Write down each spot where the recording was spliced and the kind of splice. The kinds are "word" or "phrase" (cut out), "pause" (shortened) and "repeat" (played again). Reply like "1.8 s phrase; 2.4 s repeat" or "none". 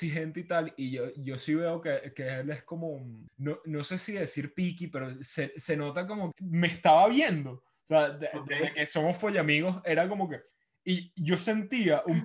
3.3 s pause; 6.3 s word; 10.5 s pause